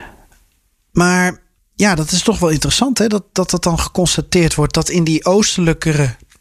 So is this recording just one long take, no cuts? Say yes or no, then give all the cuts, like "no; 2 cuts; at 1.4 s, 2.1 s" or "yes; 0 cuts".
no; 1 cut; at 1.6 s